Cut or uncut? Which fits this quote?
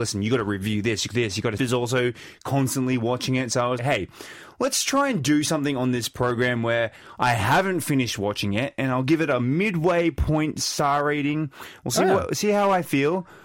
cut